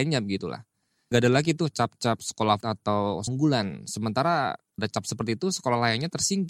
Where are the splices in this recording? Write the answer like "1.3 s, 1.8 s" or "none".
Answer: 1.1 s, 2.6 s, 3.3 s, 4.8 s

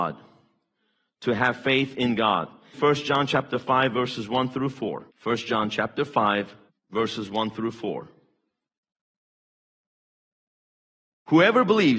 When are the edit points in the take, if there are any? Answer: 2.7 s, 5.1 s, 6.7 s

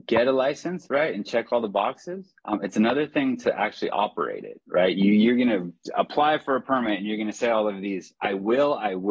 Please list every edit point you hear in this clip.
2.4 s

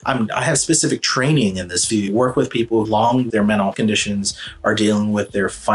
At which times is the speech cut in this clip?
1.9 s, 2.8 s, 3.3 s, 3.7 s

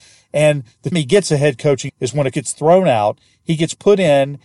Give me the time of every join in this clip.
0.9 s, 1.9 s, 2.3 s

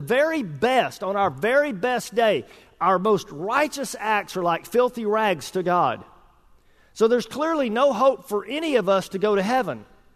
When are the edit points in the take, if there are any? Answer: none

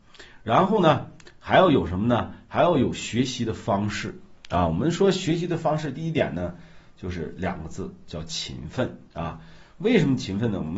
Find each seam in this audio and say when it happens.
9.1 s

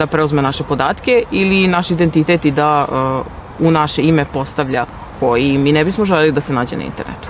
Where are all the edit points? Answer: 5.1 s

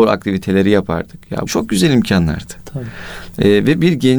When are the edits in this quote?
1.5 s

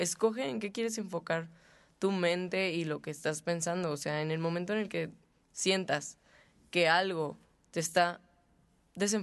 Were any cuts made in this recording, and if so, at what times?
none

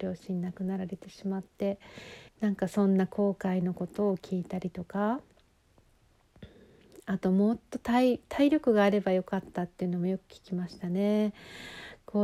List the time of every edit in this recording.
2.3 s

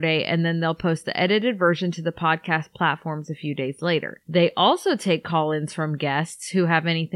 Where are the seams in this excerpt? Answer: none

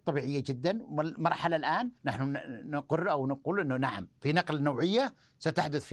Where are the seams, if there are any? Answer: 2.0 s

